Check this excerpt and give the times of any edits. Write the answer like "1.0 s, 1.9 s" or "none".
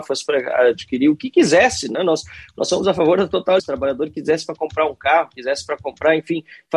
3.6 s